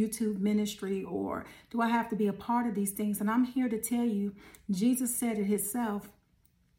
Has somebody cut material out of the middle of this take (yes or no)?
no